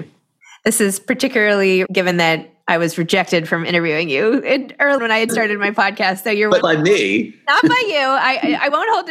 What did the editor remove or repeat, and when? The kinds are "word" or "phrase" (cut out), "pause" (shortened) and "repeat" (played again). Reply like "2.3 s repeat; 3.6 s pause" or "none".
1.9 s word; 5.0 s word; 5.3 s word; 6.6 s word